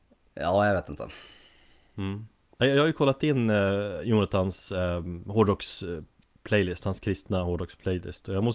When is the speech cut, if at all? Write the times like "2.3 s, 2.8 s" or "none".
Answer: none